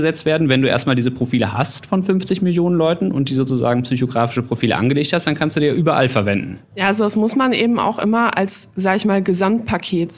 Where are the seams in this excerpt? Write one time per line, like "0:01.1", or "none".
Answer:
0:06.6